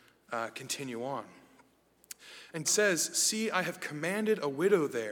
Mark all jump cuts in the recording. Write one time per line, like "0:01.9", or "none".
0:02.6